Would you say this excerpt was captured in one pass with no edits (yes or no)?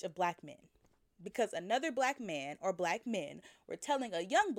yes